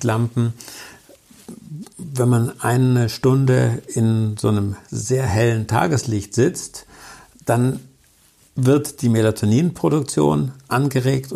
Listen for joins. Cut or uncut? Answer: uncut